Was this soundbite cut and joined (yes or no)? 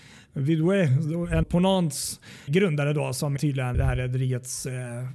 yes